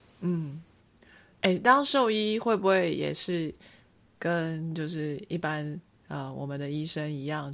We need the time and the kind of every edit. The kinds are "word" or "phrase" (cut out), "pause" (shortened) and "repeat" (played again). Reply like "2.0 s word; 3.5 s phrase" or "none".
none